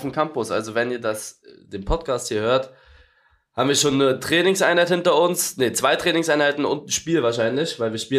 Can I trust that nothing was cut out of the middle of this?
yes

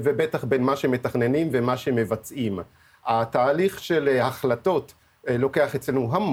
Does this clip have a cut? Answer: no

